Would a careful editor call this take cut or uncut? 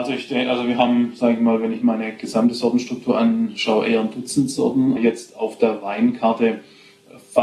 cut